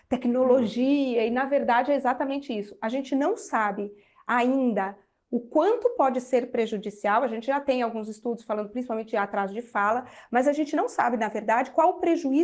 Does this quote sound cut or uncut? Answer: uncut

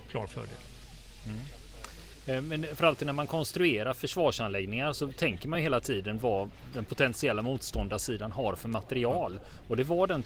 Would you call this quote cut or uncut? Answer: uncut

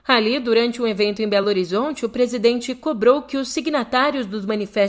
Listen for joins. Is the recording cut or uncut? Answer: uncut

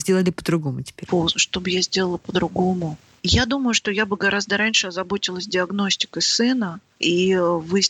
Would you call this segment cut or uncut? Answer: uncut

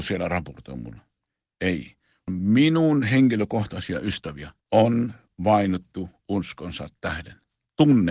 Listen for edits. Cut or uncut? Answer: cut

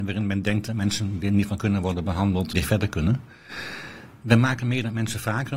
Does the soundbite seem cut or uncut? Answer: cut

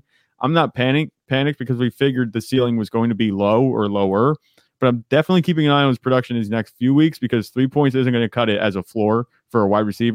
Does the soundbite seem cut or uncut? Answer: uncut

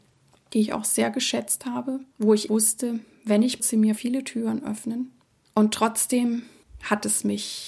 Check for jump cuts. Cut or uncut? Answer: cut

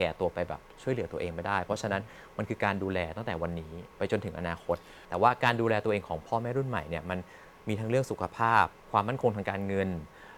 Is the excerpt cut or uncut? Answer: cut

